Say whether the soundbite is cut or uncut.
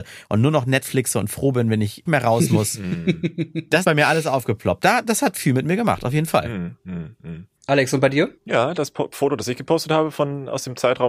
cut